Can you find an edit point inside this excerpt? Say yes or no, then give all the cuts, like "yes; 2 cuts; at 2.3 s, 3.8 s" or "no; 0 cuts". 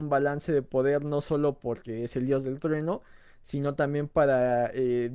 no; 0 cuts